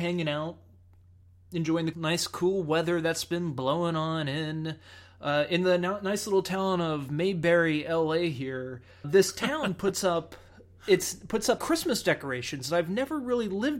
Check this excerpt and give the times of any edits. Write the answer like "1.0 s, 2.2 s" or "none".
1.9 s, 9.0 s, 11.6 s